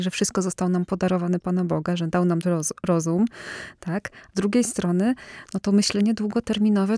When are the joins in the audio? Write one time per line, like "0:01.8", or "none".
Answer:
0:01.4
0:02.4
0:04.3